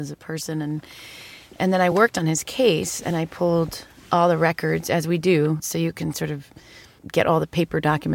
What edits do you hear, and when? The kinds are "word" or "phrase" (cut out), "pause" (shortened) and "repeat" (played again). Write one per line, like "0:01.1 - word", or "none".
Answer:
none